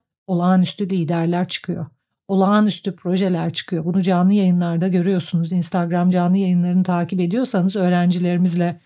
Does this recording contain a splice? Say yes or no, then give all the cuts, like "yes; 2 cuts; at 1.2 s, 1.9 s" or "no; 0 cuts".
no; 0 cuts